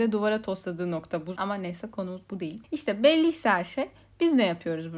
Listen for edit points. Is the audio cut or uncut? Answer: cut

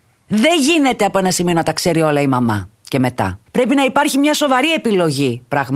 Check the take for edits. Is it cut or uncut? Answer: cut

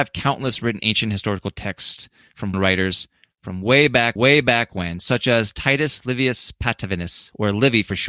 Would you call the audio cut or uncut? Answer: cut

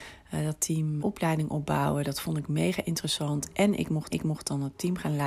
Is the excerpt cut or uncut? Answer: cut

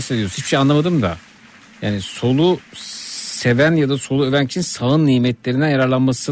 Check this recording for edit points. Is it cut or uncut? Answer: uncut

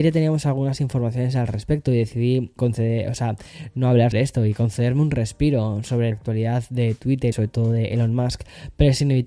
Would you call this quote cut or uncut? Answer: cut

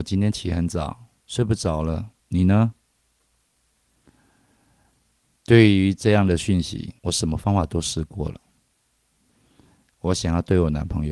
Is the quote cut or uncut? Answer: cut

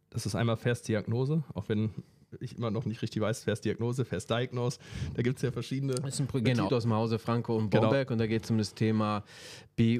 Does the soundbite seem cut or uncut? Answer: cut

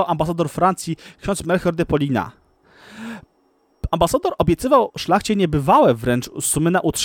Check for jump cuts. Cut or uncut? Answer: uncut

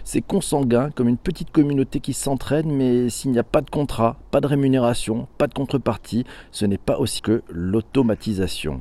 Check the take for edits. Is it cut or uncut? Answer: cut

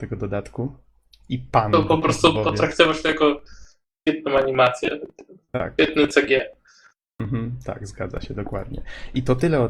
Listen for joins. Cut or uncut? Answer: uncut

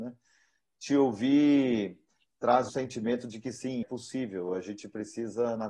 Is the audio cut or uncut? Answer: cut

